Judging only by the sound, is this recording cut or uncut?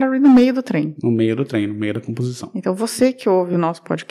uncut